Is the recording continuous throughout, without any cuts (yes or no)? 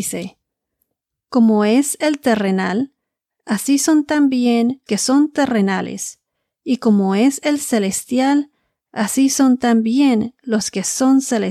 no